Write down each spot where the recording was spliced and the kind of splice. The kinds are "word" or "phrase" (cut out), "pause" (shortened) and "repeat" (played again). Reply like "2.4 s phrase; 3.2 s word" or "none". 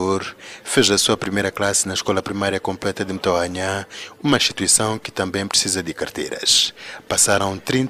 none